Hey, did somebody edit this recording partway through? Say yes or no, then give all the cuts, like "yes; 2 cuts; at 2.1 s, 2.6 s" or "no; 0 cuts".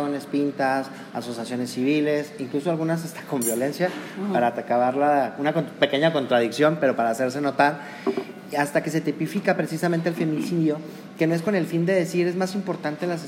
no; 0 cuts